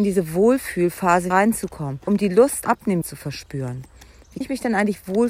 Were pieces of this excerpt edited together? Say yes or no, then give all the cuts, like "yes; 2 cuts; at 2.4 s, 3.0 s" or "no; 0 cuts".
yes; 5 cuts; at 1.3 s, 2.1 s, 2.7 s, 3.0 s, 4.4 s